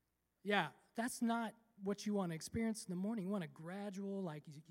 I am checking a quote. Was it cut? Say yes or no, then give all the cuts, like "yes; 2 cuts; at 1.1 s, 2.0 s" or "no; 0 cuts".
no; 0 cuts